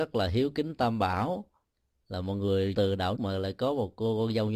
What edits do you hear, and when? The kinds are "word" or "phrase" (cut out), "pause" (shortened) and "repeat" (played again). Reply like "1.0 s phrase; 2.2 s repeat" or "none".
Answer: 2.7 s word; 3.2 s word

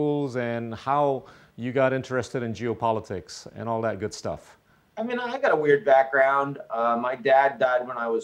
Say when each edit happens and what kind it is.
none

